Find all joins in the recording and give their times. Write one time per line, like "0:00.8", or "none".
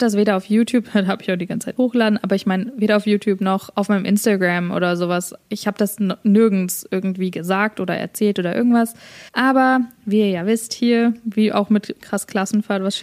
0:01.8
0:09.3